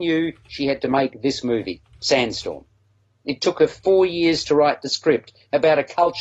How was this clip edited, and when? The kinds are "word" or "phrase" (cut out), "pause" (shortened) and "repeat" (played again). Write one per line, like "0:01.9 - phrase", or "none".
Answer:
none